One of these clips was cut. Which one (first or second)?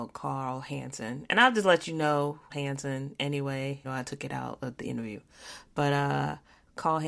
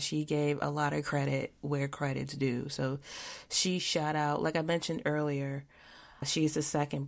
first